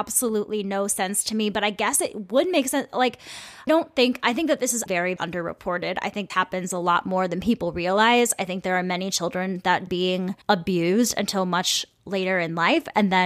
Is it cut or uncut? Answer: cut